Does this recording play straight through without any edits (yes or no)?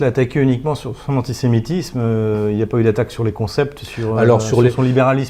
yes